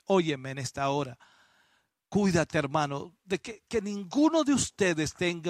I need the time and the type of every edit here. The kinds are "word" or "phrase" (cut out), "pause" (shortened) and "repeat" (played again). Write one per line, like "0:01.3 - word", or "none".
none

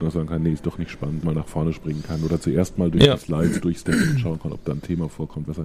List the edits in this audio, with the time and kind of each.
0:01.2 - word

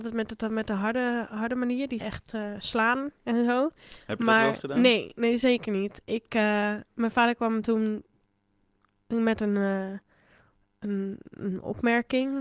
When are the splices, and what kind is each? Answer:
0:02.0 - word

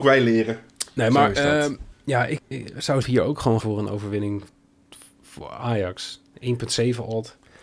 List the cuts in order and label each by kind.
0:01.9 - pause
0:02.4 - word
0:03.0 - word
0:03.6 - word

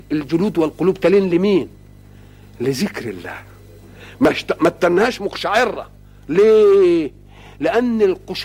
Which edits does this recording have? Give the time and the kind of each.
none

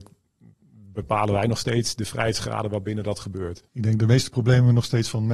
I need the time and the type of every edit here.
0:03.7 - pause

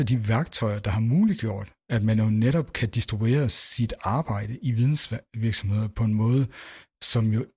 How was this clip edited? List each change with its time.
none

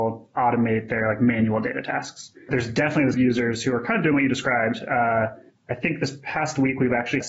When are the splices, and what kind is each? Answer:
0:03.1 - phrase

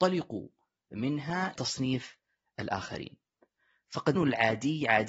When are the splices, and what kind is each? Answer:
0:01.6 - word
0:04.2 - word

